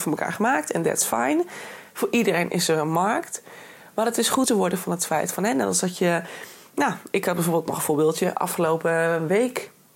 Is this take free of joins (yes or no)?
no